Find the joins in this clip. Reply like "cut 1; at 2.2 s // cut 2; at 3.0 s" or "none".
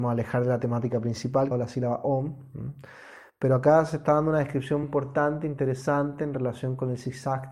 cut 1; at 1.5 s // cut 2; at 4.8 s